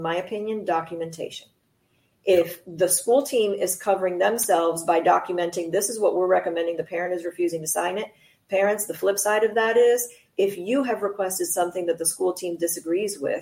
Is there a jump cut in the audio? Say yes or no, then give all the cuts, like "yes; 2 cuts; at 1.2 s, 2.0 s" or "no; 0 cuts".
no; 0 cuts